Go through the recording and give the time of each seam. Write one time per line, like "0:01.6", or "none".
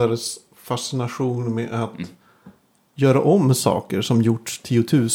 none